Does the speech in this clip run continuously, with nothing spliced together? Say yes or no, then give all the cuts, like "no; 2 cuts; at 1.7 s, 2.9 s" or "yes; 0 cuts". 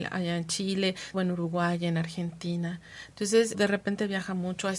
no; 2 cuts; at 1.1 s, 3.5 s